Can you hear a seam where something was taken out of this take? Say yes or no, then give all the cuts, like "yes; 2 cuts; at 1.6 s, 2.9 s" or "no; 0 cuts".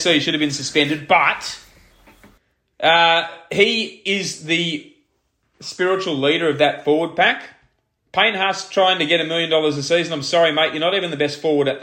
no; 0 cuts